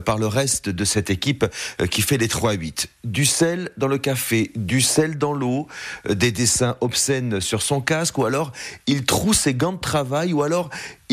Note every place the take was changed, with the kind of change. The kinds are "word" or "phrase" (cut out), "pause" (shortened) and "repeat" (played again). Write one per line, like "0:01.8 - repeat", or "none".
none